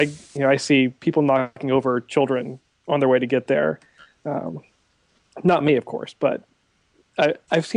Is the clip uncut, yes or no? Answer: yes